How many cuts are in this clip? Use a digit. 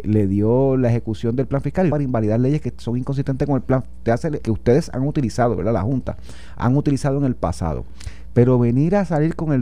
3